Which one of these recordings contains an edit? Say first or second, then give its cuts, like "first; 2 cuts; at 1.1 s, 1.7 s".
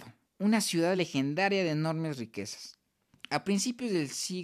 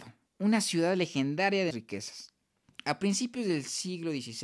second; 1 cut; at 1.7 s